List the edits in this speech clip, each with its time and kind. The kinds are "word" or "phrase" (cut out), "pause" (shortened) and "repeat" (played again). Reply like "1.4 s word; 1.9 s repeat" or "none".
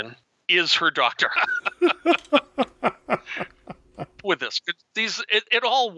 4.2 s phrase